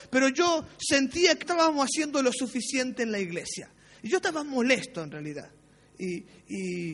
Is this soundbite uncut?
no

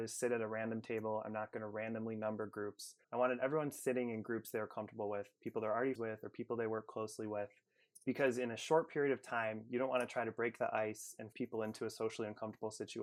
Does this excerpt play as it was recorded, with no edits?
no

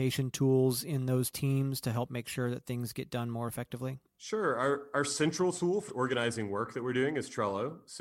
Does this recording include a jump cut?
yes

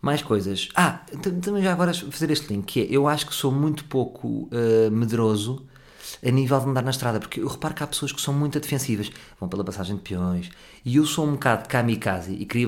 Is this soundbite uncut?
yes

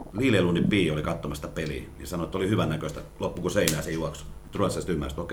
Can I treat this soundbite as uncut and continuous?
yes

